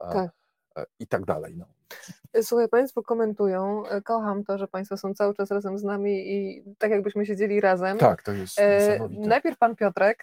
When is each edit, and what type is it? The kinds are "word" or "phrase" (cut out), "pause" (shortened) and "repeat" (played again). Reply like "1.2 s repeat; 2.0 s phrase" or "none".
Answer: none